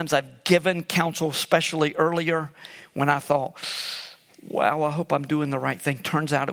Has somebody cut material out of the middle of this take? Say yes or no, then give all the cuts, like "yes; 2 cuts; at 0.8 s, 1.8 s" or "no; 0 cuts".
no; 0 cuts